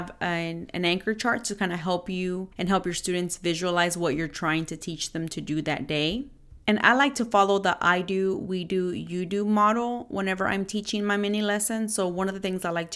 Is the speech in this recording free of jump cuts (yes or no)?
no